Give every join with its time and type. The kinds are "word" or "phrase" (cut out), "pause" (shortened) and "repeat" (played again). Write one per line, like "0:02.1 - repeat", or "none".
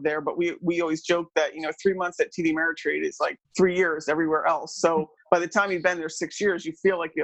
0:03.4 - pause